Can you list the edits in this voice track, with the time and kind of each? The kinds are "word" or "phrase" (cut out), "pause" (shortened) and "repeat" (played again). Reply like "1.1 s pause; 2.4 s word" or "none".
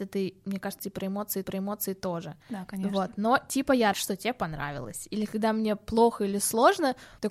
1.4 s repeat; 3.9 s word